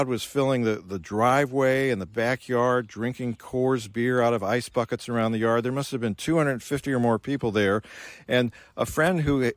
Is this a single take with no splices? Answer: yes; 0 cuts

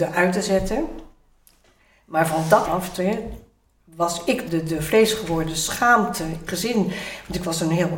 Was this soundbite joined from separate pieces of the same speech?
yes; 3 cuts; at 2.6 s, 4.5 s, 6.5 s

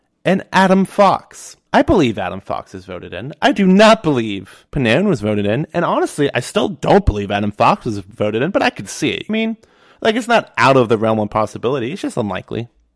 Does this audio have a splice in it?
yes; 3 cuts; at 1.7 s, 4.7 s, 9.3 s

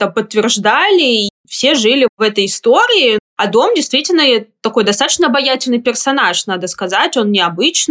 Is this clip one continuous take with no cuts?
yes; 0 cuts

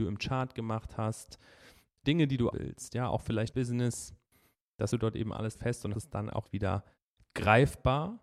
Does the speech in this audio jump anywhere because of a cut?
yes; 7 cuts; at 2.0 s, 2.5 s, 3.5 s, 4.9 s, 5.5 s, 5.9 s, 6.4 s

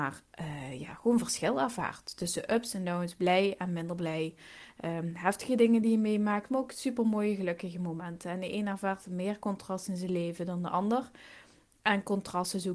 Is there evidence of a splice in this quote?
no; 0 cuts

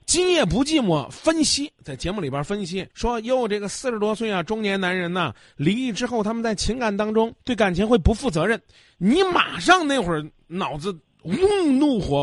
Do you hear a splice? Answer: yes; 2 cuts; at 2.9 s, 7.4 s

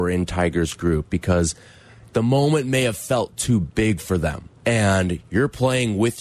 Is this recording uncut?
no; 1 cut; at 4.6 s

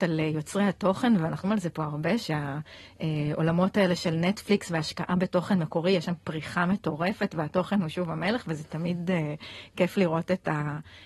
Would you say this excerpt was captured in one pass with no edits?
no; 1 cut; at 1.4 s

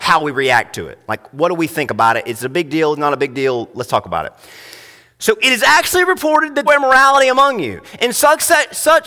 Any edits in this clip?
yes; 1 cut; at 6.7 s

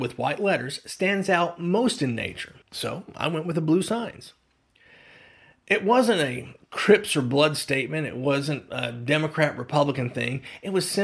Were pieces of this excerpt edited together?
yes; 1 cut; at 2.6 s

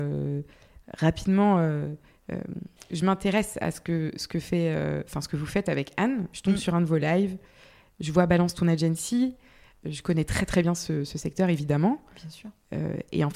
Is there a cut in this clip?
no; 0 cuts

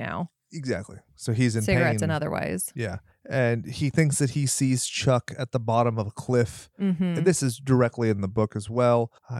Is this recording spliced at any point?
no; 0 cuts

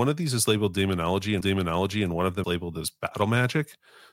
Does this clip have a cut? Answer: yes; 2 cuts; at 1.4 s, 2.4 s

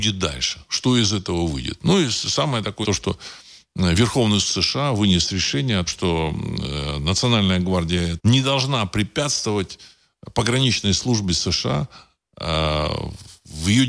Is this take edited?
yes; 4 cuts; at 2.8 s, 4.4 s, 5.9 s, 8.2 s

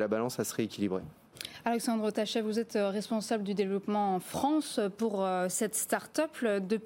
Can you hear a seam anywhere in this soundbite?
no; 0 cuts

